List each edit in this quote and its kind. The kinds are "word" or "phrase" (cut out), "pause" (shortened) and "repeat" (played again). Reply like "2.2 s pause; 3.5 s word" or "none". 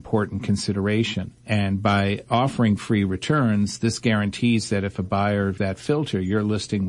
1.4 s pause; 5.6 s word